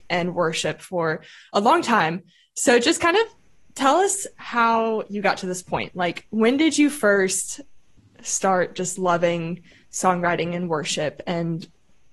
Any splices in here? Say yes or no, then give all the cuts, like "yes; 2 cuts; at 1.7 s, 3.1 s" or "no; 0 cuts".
no; 0 cuts